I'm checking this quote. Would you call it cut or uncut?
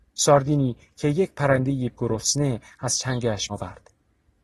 cut